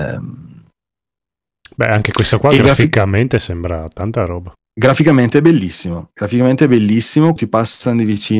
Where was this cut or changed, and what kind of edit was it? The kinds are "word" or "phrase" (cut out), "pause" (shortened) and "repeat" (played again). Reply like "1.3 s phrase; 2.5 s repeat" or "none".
7.4 s word